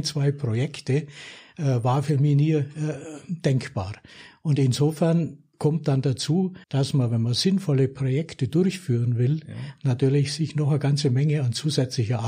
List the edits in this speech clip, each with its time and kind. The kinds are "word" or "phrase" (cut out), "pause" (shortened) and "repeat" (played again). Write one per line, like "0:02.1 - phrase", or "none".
0:05.5 - pause
0:06.6 - pause